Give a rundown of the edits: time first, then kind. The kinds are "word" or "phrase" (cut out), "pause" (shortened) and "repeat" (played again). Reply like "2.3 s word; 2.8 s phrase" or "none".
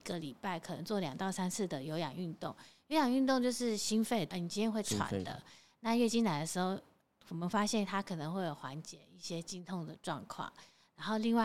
4.3 s word